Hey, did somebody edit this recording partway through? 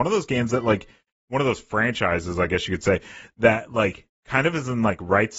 no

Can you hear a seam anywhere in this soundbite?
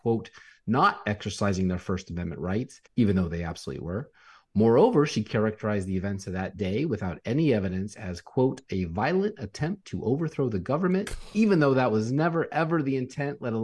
yes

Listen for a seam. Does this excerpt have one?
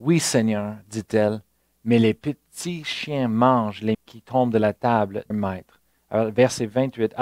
yes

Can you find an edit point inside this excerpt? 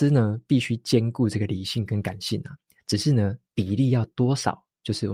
no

